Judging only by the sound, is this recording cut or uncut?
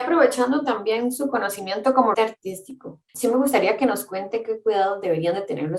cut